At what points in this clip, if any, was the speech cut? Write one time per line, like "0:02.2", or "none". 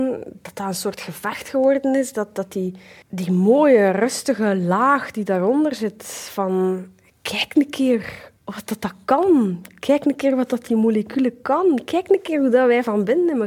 0:03.0
0:07.1
0:08.4